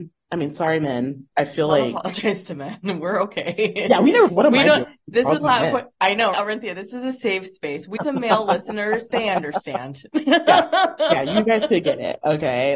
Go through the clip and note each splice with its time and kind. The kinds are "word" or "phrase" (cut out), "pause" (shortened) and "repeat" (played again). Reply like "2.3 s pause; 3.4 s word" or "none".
1.3 s word; 4.3 s word; 5.4 s word; 6.3 s word; 8.0 s word; 9.1 s word